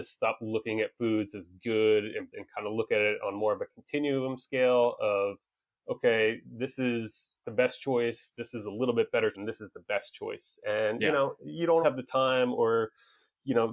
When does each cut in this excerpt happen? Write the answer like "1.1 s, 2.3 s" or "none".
2.3 s, 7.4 s, 9.3 s, 11.8 s